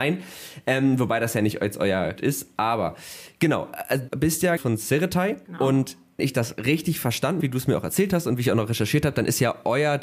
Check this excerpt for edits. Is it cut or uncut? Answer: cut